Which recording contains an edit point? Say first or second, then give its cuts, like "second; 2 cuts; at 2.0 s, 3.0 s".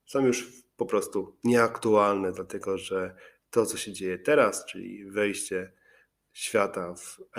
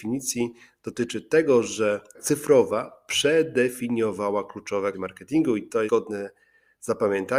second; 3 cuts; at 2.1 s, 4.9 s, 5.9 s